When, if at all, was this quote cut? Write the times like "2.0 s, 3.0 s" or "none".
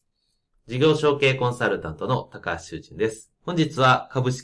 3.4 s